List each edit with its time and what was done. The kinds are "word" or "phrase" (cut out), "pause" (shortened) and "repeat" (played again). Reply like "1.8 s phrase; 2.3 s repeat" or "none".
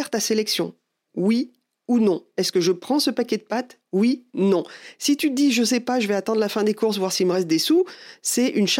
4.3 s pause